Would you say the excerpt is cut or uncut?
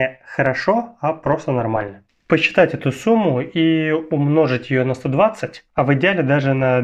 cut